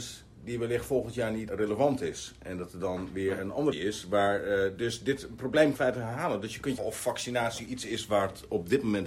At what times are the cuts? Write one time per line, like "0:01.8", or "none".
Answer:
0:01.5
0:03.7
0:05.7
0:06.8
0:07.6

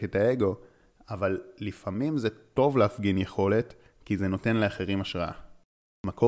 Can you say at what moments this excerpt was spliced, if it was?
none

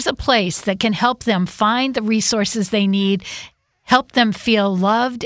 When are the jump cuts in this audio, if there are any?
none

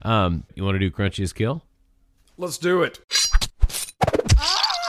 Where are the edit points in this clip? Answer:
none

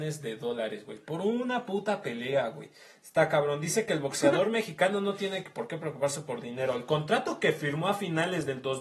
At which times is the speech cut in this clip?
none

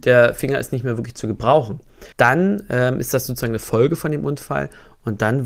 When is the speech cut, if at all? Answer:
0:02.1

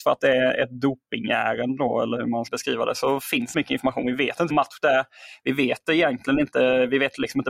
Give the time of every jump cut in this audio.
0:02.5
0:03.5
0:04.5

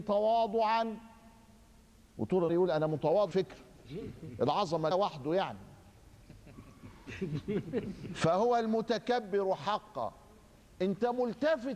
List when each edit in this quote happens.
0:02.5
0:03.3
0:04.9

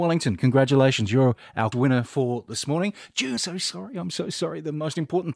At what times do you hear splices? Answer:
0:01.7
0:03.4

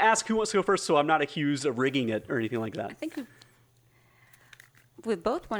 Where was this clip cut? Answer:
none

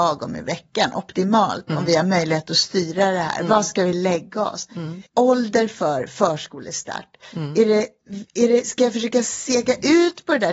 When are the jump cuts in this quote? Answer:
0:05.1
0:08.3

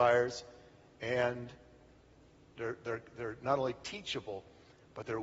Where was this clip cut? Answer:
none

